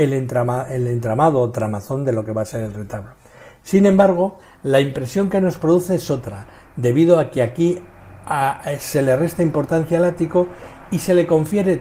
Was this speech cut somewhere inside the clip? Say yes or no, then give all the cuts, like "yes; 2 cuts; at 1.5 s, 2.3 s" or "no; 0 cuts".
no; 0 cuts